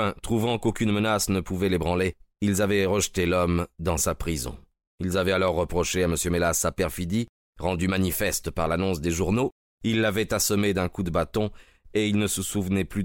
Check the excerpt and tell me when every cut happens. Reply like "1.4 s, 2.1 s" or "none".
none